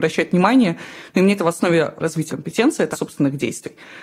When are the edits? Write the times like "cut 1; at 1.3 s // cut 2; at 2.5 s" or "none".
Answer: cut 1; at 1.4 s // cut 2; at 2.3 s // cut 3; at 2.9 s